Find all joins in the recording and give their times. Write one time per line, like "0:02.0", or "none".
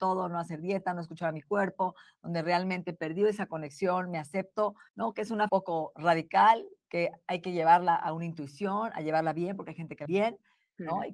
0:04.9
0:05.5
0:06.8
0:10.1